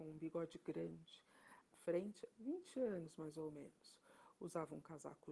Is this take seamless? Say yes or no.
no